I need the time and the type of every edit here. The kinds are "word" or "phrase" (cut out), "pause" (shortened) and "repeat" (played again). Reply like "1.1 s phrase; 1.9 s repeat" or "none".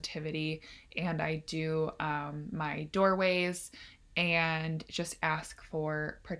none